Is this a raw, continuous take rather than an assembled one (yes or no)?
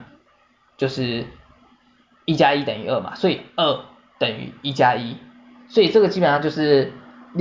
yes